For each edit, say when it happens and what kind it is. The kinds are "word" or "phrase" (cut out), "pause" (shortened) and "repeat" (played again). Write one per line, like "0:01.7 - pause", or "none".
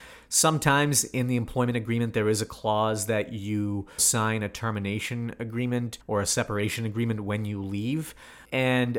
0:04.0 - word
0:06.0 - pause